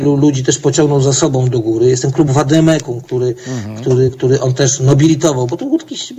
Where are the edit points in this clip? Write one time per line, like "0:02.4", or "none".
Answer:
none